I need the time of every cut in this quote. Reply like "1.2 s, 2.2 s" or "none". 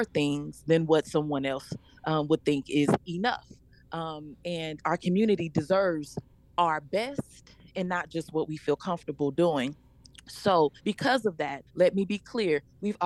10.8 s, 11.7 s